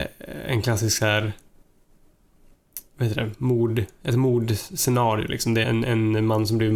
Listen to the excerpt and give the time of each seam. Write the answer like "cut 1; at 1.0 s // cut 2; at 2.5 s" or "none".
cut 1; at 2.9 s // cut 2; at 5.6 s